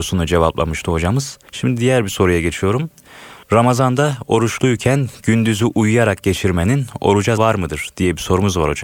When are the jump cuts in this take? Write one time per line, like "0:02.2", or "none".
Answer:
0:01.5
0:03.4
0:07.4